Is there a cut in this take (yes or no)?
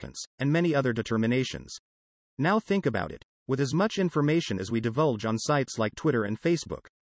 no